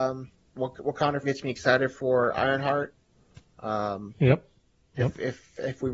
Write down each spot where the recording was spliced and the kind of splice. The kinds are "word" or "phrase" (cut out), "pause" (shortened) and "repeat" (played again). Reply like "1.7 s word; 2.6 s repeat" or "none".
1.2 s word